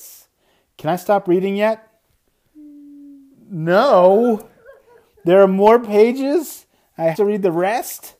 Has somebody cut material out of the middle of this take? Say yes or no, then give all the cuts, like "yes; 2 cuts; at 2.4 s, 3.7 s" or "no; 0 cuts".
yes; 1 cut; at 7.1 s